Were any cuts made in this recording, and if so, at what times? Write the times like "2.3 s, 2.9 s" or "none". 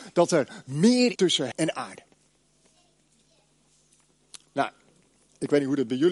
1.2 s, 1.5 s